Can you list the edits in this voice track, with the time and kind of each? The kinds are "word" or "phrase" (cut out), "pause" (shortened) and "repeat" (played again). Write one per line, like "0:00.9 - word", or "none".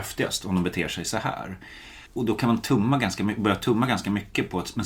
0:02.1 - pause

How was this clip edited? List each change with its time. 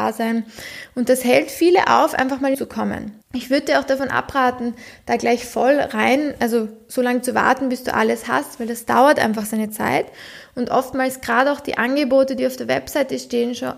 0:02.5 - phrase
0:03.2 - pause

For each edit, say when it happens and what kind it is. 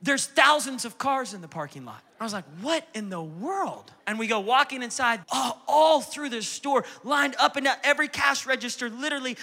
0:02.1 - pause
0:04.0 - pause
0:05.2 - phrase

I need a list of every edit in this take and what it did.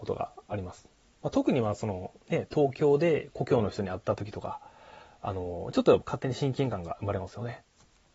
none

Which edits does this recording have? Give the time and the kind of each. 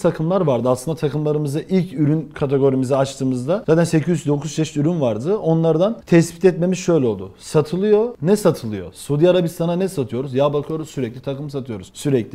none

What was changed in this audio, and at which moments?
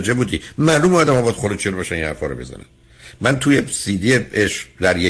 none

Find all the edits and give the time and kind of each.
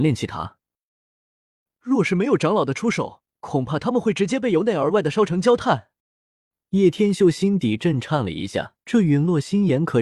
0:03.3 - pause
0:06.0 - pause
0:08.8 - pause

